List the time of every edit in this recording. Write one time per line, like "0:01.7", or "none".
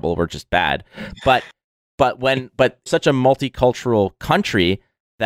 0:02.9